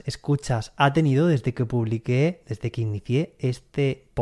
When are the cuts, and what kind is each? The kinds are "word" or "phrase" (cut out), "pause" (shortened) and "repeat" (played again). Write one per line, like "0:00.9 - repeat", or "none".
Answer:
none